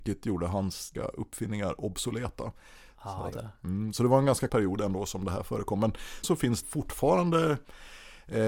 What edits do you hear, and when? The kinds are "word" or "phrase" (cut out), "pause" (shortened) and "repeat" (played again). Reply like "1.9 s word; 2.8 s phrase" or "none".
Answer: 1.0 s word; 3.3 s word; 4.5 s word; 6.2 s word; 6.6 s word